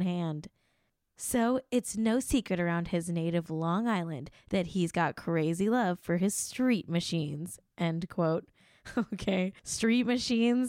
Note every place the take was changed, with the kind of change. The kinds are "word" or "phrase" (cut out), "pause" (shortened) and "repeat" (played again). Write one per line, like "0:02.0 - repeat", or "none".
0:09.6 - pause